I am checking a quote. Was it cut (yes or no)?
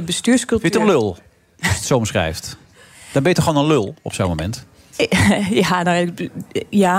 no